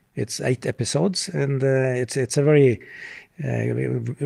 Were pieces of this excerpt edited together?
no; 0 cuts

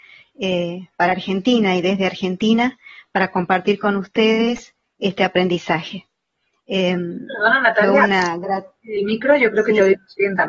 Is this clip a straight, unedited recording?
yes; 0 cuts

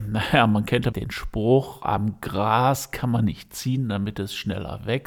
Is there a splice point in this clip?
yes; 1 cut; at 0.9 s

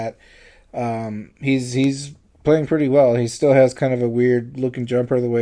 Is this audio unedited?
yes; 0 cuts

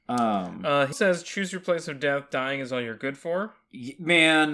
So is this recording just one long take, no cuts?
no; 1 cut; at 0.9 s

